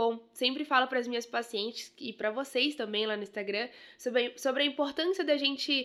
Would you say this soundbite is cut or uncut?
uncut